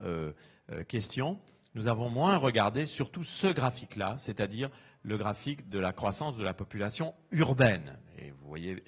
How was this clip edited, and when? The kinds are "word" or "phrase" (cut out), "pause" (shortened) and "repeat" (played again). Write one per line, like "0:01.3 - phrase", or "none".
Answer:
none

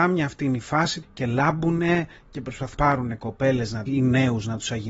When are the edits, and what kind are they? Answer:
0:01.0 - word
0:02.7 - word
0:03.9 - word

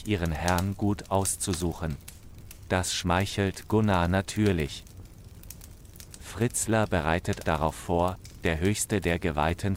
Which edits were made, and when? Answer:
0:07.4 - word
0:08.4 - word

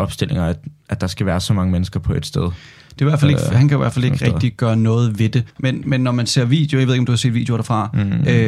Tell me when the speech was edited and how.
0:05.5 - pause

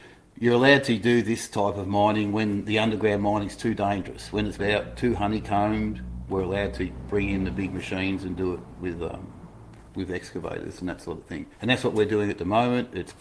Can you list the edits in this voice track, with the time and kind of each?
0:04.6 - phrase
0:09.9 - pause
0:11.5 - pause

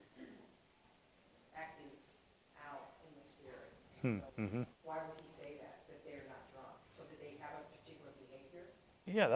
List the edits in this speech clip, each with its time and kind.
0:04.3 - pause
0:04.7 - pause
0:06.8 - pause

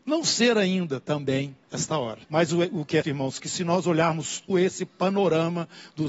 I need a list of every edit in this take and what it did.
0:01.6 - pause
0:02.2 - pause
0:03.0 - word
0:04.5 - word

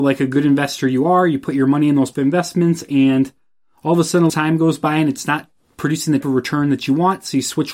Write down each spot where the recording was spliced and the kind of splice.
0:02.1 - word
0:04.3 - word
0:06.2 - word

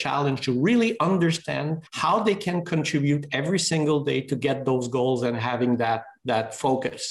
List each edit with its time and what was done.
0:01.9 - pause

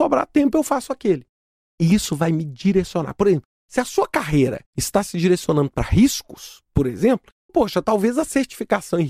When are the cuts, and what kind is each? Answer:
0:04.7 - pause
0:07.5 - word

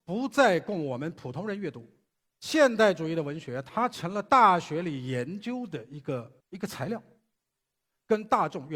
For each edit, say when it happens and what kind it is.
0:02.1 - pause
0:06.4 - pause

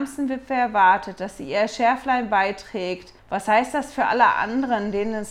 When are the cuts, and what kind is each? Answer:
0:03.2 - pause

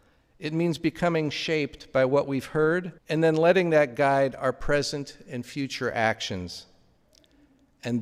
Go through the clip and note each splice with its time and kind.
0:03.0 - pause

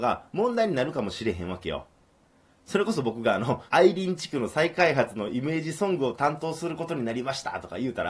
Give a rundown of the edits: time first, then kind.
0:03.7 - pause

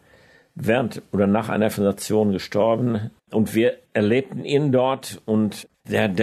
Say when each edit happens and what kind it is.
0:03.2 - pause

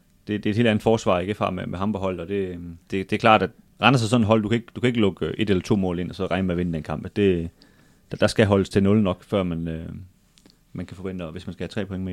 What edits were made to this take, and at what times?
0:02.8 - pause

